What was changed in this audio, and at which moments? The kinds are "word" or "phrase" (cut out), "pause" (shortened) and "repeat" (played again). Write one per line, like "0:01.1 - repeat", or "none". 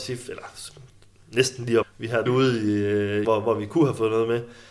0:01.8 - phrase
0:02.3 - phrase
0:03.2 - phrase